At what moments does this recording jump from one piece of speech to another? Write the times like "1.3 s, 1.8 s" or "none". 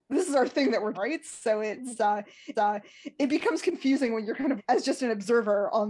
0.9 s, 2.5 s, 4.6 s